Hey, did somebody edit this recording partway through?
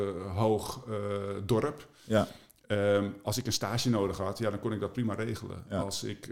no; 0 cuts

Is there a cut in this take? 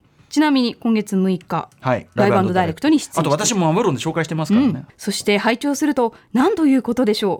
yes; 1 cut; at 4.9 s

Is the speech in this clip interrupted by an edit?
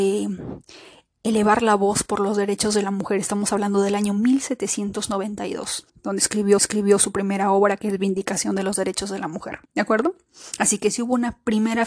yes; 3 cuts; at 5.9 s, 6.6 s, 9.7 s

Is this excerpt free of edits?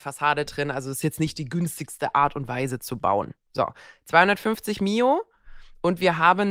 yes; 0 cuts

